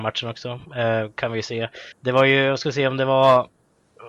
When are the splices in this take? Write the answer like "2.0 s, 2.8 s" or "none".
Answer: 1.9 s